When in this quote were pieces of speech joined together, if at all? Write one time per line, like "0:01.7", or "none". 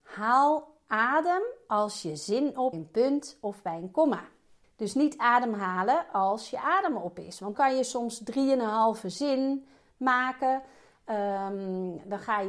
0:02.7
0:04.6
0:07.5